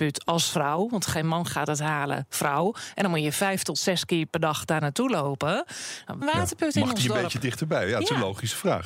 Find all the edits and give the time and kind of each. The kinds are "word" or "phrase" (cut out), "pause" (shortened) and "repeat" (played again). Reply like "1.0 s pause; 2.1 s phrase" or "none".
6.2 s word